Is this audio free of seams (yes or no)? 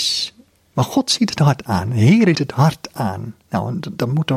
no